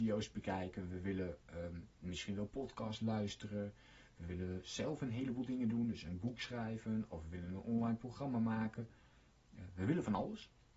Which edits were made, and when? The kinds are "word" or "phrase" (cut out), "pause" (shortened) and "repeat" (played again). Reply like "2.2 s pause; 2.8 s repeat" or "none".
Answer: none